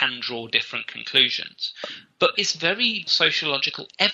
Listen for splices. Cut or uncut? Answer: cut